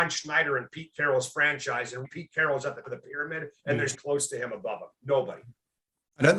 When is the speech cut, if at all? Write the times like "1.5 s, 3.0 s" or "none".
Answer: 2.0 s, 2.8 s, 3.9 s